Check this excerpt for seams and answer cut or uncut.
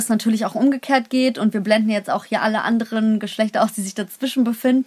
uncut